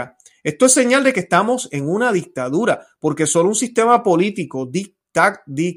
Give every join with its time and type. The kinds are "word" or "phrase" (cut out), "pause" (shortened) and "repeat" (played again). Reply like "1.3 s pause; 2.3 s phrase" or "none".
none